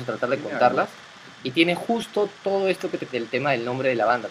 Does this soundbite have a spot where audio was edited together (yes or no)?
yes